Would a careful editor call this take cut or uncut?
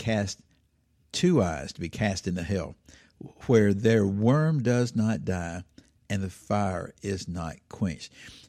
uncut